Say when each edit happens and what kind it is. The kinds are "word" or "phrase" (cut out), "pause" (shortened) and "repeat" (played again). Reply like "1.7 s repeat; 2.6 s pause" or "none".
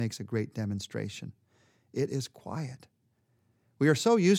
none